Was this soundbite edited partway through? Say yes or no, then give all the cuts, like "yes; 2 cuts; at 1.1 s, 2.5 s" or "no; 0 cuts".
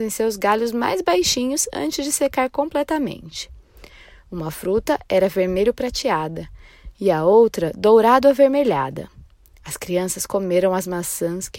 no; 0 cuts